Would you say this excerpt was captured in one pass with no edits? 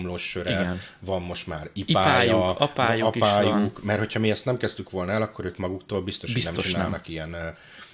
yes; 0 cuts

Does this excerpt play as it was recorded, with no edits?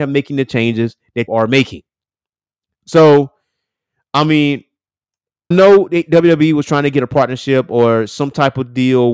no; 2 cuts; at 1.3 s, 5.5 s

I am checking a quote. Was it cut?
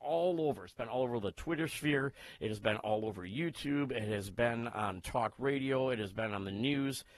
no; 0 cuts

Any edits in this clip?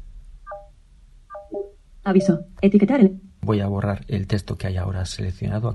no; 0 cuts

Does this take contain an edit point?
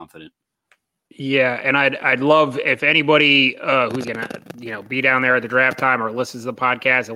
yes; 1 cut; at 4.0 s

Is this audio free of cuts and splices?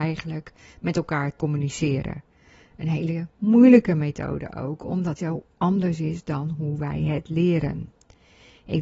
no; 2 cuts; at 1.4 s, 5.2 s

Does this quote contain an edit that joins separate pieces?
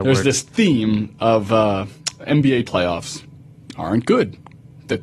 yes; 1 cut; at 2.6 s

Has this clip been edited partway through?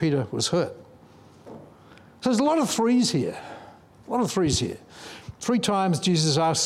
no; 0 cuts

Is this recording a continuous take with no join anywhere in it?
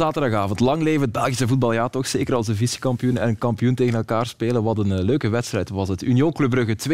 yes; 0 cuts

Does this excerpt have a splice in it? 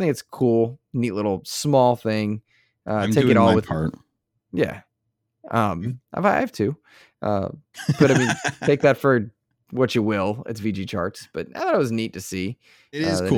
yes; 1 cut; at 6.0 s

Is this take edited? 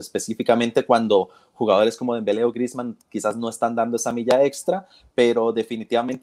no; 0 cuts

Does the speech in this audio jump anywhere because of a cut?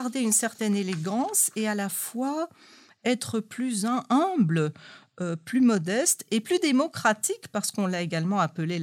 no; 0 cuts

